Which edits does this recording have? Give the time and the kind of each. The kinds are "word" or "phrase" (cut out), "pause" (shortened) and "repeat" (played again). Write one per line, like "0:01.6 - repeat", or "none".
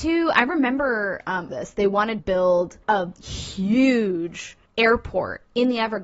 0:01.5 - phrase
0:02.2 - word
0:02.8 - pause
0:04.7 - pause

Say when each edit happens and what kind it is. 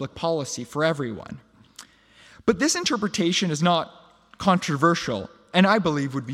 none

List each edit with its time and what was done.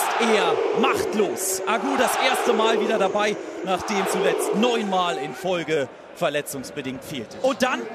0:04.0 - word

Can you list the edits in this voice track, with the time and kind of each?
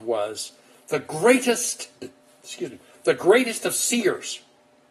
none

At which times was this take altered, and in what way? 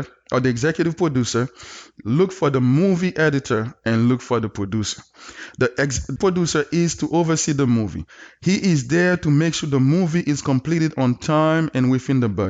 0:06.2 - word

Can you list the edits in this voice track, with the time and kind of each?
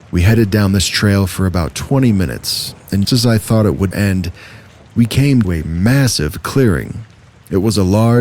0:03.0 - word
0:03.9 - word
0:05.4 - word

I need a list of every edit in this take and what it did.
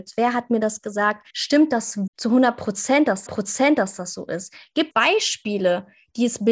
0:01.3 - pause
0:02.1 - word
0:03.3 - repeat
0:04.9 - word

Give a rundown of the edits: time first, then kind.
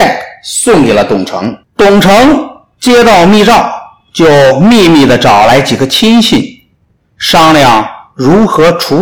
0:01.6 - pause

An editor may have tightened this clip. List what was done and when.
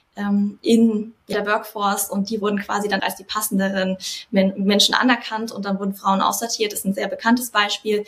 0:01.3 - word
0:03.0 - word

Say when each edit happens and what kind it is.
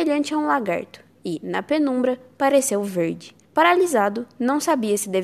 0:03.4 - pause

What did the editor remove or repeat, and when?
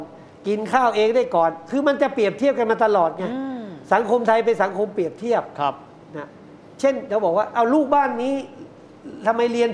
none

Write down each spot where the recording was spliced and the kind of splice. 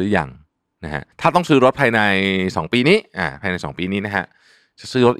0:01.1 - pause

